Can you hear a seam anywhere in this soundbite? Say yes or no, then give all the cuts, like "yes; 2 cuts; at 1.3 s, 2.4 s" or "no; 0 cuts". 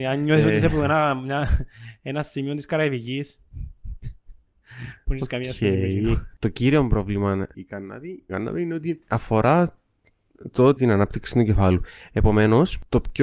yes; 3 cuts; at 7.5 s, 8.3 s, 10.8 s